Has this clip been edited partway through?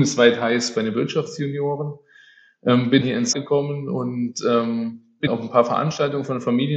yes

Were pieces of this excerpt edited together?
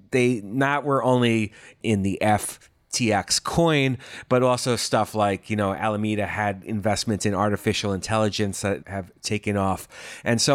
no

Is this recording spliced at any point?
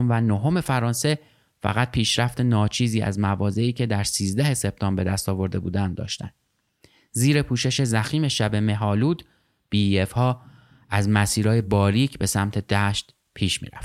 no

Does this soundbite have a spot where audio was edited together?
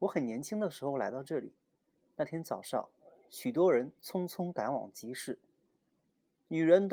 no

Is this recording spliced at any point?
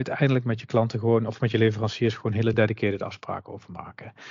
no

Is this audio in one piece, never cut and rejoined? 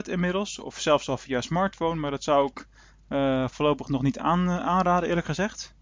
yes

